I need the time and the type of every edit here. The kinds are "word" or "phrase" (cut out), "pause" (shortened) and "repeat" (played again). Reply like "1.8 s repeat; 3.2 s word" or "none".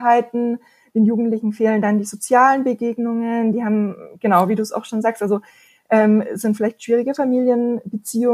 none